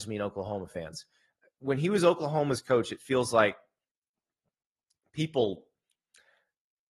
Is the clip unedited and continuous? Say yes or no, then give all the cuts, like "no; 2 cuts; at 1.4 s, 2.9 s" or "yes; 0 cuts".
yes; 0 cuts